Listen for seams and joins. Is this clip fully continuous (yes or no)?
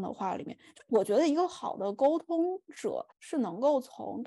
no